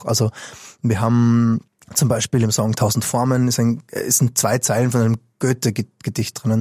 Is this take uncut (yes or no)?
no